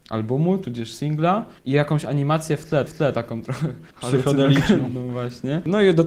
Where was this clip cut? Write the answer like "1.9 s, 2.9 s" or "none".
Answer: 1.6 s, 2.9 s, 3.9 s

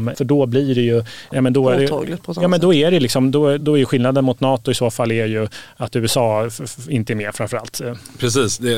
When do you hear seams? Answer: 3.6 s

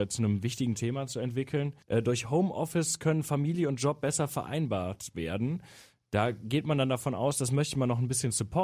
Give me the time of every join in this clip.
1.8 s

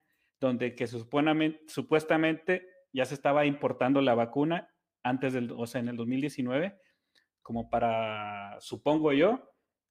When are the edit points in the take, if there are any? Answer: none

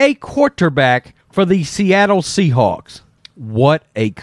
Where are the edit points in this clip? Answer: 1.2 s, 3.2 s

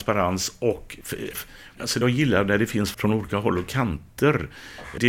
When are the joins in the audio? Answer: 1.3 s, 2.0 s, 2.9 s

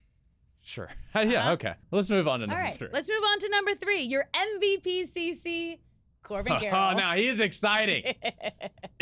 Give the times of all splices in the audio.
1.8 s

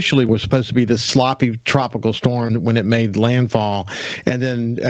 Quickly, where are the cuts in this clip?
none

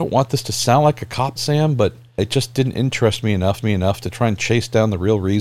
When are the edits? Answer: 1.4 s, 2.2 s, 3.6 s

